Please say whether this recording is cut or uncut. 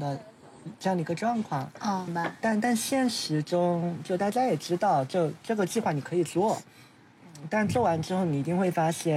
cut